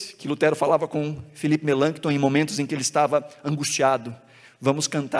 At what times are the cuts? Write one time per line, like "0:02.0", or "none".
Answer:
none